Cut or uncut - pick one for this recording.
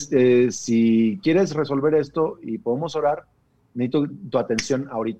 uncut